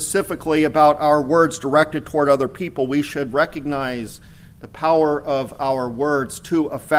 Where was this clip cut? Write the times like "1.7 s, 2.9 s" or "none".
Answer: none